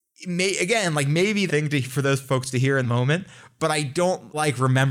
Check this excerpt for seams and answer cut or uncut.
cut